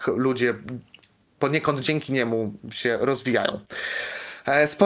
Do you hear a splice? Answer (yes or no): no